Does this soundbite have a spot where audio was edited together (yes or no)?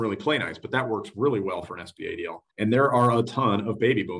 yes